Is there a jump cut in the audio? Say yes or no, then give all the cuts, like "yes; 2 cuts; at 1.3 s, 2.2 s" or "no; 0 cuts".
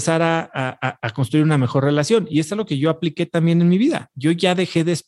no; 0 cuts